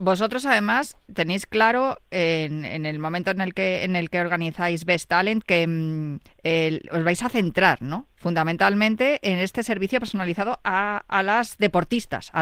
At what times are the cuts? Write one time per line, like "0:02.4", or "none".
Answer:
0:06.3